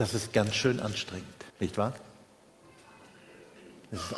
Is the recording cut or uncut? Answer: cut